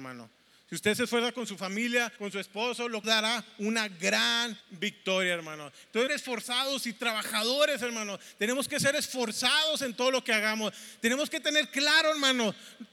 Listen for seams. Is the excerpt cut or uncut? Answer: cut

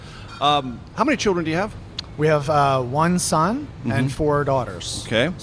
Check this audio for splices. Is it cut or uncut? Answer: uncut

